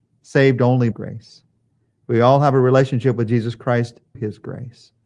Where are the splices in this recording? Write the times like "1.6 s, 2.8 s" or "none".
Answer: 0.9 s, 4.1 s